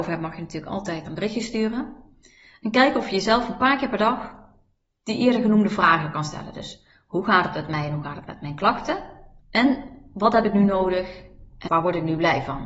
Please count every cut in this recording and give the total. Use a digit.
3